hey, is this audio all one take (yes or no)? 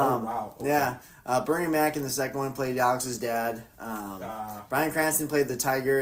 yes